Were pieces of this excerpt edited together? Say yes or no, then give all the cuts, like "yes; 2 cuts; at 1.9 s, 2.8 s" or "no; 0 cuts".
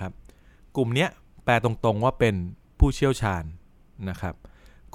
no; 0 cuts